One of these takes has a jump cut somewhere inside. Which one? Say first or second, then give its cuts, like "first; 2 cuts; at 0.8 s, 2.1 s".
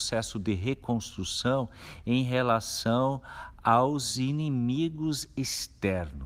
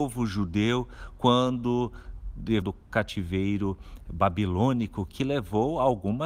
second; 1 cut; at 2.6 s